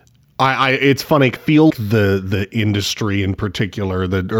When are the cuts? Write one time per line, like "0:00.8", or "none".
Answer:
0:01.4
0:01.7